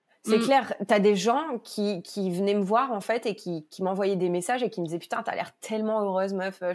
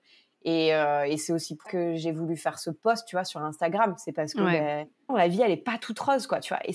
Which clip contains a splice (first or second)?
second